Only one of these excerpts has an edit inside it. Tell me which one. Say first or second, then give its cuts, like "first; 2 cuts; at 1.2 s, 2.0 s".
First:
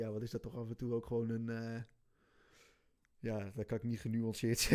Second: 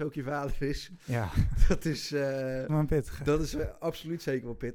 second; 1 cut; at 2.7 s